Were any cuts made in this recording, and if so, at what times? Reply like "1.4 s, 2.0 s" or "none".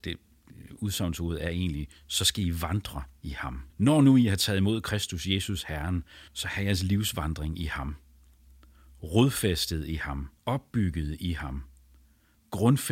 3.7 s, 6.3 s, 10.4 s